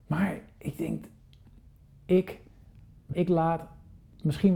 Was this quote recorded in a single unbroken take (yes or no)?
no